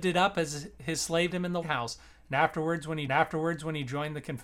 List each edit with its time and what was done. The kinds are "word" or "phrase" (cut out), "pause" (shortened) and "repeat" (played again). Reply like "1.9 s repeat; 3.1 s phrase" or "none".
1.3 s word; 1.6 s word; 3.1 s repeat